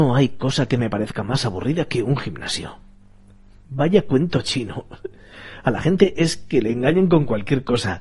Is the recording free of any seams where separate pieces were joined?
yes; 0 cuts

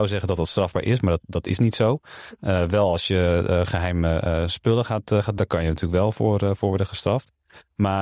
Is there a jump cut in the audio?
yes; 1 cut; at 5.4 s

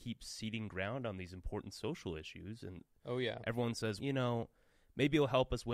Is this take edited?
yes; 1 cut; at 4.0 s

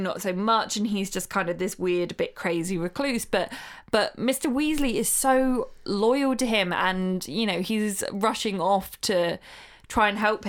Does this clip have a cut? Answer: no; 0 cuts

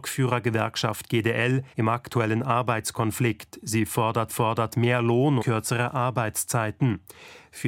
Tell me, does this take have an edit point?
yes; 3 cuts; at 1.7 s, 4.3 s, 5.4 s

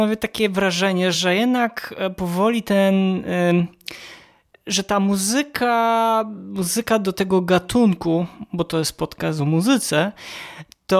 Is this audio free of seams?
yes; 0 cuts

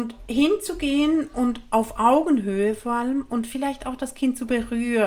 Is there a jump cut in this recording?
no; 0 cuts

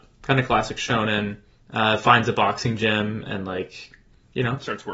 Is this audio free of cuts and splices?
yes; 0 cuts

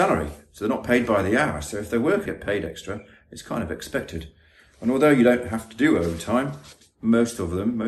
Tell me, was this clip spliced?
yes; 1 cut; at 2.3 s

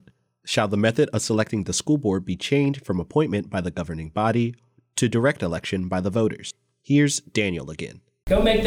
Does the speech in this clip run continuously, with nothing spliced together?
yes; 0 cuts

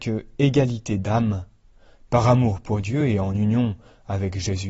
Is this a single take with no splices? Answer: yes; 0 cuts

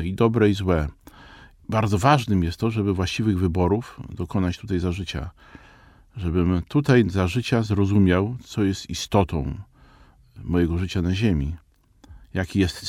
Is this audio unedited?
yes; 0 cuts

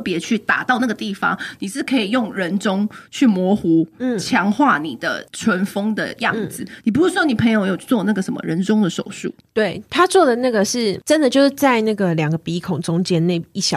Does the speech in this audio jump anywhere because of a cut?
no; 0 cuts

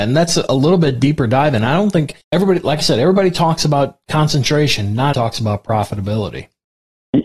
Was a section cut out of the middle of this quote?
yes; 2 cuts; at 2.2 s, 5.1 s

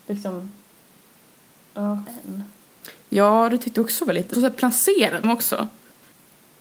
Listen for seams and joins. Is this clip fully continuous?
no; 3 cuts; at 2.0 s, 4.3 s, 5.2 s

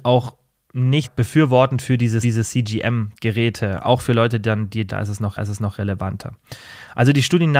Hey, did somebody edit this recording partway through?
yes; 4 cuts; at 1.0 s, 2.2 s, 4.9 s, 5.4 s

